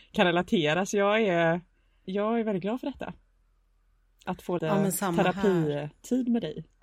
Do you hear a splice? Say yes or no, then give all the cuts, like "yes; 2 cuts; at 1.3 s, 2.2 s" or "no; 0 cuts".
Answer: yes; 2 cuts; at 2.0 s, 4.6 s